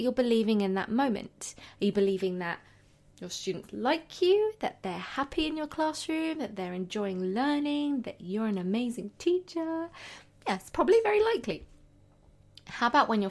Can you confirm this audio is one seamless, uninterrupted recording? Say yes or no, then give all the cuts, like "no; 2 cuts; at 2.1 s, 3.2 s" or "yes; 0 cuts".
yes; 0 cuts